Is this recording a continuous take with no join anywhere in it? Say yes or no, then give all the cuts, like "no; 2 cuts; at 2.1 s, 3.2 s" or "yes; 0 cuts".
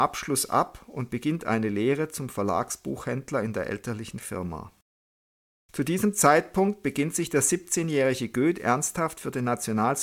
yes; 0 cuts